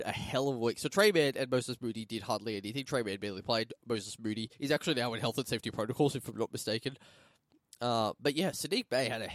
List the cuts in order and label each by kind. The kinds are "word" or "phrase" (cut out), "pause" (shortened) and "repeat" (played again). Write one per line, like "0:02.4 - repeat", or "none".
0:04.5 - pause